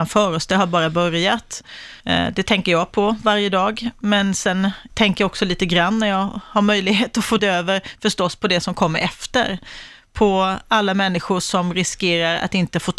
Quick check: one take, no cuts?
no; 3 cuts; at 2.0 s, 4.9 s, 7.4 s

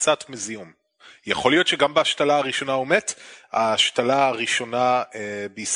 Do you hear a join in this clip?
no; 0 cuts

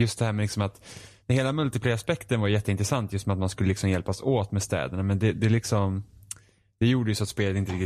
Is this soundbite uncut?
yes; 0 cuts

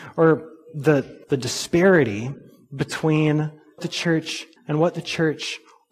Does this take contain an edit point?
yes; 3 cuts; at 1.2 s, 3.8 s, 4.6 s

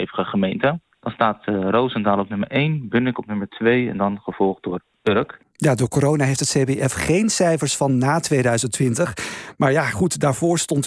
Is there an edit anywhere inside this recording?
no; 0 cuts

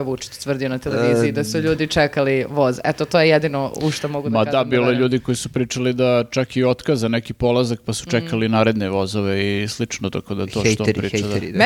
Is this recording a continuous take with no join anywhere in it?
yes; 0 cuts

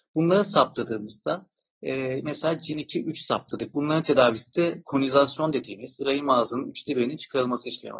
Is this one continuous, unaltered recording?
yes; 0 cuts

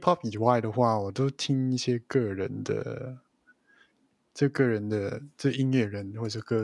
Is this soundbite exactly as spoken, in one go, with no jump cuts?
yes; 0 cuts

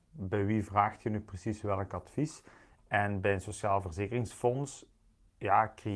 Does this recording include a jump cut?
no; 0 cuts

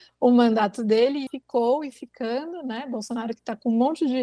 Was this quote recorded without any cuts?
no; 2 cuts; at 1.3 s, 1.9 s

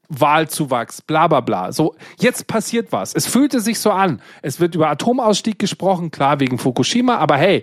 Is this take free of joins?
yes; 0 cuts

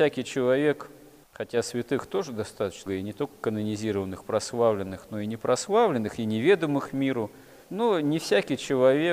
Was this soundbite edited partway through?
yes; 1 cut; at 2.9 s

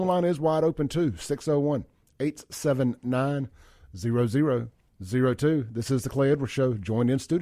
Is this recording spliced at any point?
no; 0 cuts

